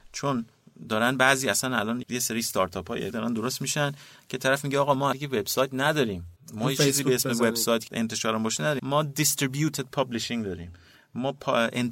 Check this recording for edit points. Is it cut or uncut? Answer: cut